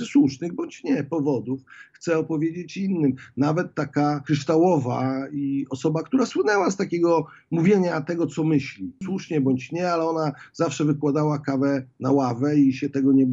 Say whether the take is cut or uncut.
uncut